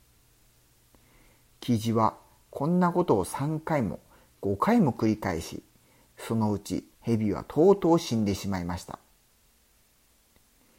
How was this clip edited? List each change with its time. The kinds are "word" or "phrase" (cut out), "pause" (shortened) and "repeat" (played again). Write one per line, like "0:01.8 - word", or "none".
0:06.9 - pause

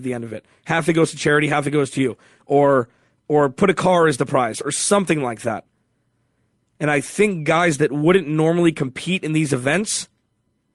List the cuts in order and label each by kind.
none

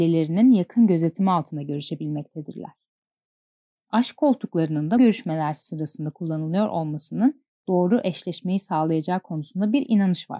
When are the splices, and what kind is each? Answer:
0:05.0 - word

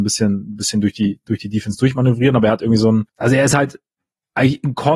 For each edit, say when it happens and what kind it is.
0:03.1 - pause
0:03.9 - pause

